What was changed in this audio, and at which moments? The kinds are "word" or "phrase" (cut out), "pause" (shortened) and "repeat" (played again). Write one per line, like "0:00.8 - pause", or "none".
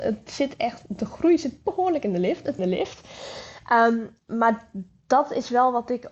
0:02.6 - phrase